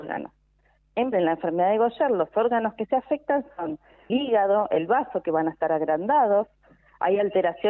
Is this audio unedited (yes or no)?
no